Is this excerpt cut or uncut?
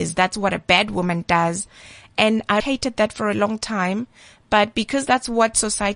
cut